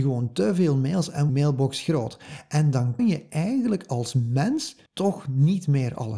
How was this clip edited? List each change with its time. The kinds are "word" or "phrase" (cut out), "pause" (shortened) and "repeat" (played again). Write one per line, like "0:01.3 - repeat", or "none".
0:01.3 - phrase
0:01.8 - word
0:03.0 - word
0:04.9 - pause